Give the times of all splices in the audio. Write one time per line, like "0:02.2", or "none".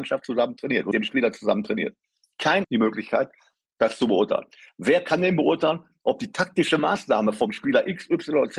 0:00.9
0:02.6